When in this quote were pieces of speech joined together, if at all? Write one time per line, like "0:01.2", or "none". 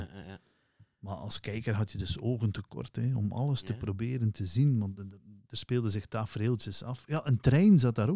none